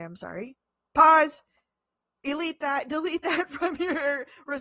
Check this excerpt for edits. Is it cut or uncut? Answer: uncut